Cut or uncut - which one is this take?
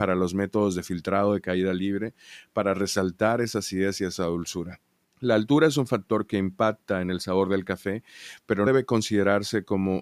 cut